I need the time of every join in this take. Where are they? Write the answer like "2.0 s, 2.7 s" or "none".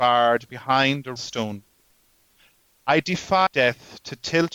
1.2 s, 3.5 s